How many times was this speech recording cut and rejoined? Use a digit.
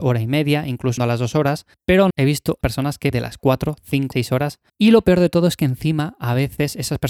7